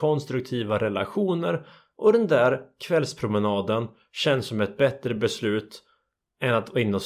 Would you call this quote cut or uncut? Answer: uncut